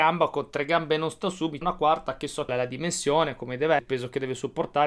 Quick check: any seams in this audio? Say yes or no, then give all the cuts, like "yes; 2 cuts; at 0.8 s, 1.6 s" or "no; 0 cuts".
yes; 3 cuts; at 1.6 s, 2.5 s, 3.8 s